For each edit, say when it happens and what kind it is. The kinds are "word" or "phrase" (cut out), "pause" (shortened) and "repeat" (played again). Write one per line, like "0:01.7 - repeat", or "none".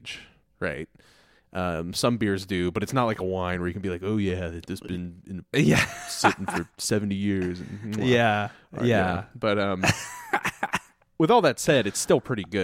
none